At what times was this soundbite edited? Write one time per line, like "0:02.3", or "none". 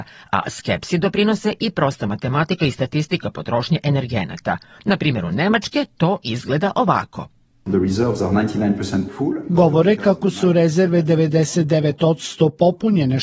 none